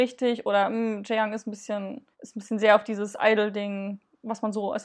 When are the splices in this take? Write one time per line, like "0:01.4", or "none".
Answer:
0:02.1